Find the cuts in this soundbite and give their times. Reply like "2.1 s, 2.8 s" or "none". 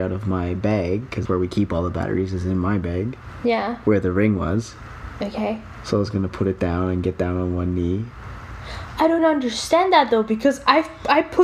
1.3 s, 9.2 s